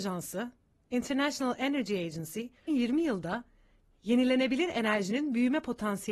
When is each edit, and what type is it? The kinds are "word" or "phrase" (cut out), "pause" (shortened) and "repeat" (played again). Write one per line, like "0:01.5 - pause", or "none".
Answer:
0:02.7 - word